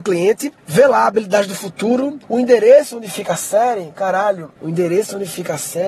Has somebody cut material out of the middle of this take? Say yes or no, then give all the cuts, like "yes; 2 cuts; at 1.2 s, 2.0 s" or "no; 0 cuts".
yes; 2 cuts; at 2.2 s, 4.6 s